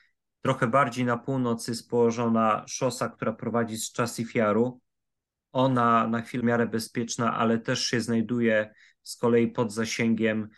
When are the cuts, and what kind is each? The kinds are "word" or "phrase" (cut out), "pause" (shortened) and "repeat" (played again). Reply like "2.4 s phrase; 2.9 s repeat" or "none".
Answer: 6.4 s phrase